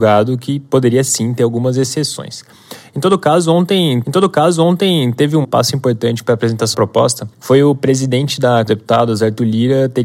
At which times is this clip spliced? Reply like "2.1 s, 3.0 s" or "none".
4.0 s, 5.4 s, 6.7 s, 7.3 s, 8.7 s